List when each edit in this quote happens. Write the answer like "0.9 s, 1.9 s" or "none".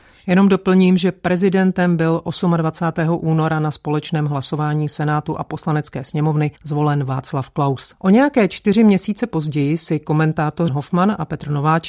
6.6 s, 8.0 s, 10.7 s